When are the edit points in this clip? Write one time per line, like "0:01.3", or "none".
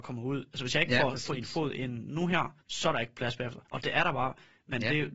0:02.6
0:03.6